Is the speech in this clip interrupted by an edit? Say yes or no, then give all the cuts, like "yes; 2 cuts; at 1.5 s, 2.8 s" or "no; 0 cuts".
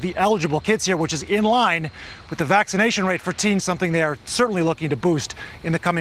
yes; 1 cut; at 3.6 s